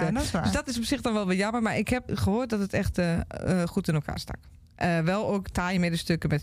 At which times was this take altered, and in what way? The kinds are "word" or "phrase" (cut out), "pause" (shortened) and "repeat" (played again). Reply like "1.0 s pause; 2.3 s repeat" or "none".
2.1 s word

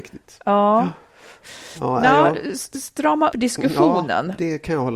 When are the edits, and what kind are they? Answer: 3.3 s word

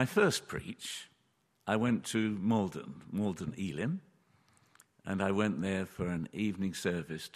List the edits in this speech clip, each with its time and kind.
none

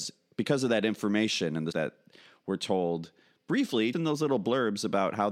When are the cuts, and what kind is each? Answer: 1.7 s word; 3.9 s word

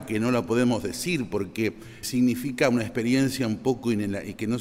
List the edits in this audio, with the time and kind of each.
2.0 s word

